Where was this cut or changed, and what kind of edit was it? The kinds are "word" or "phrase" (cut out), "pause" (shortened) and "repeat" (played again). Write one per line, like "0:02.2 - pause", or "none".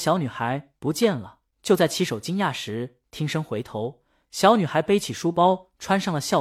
none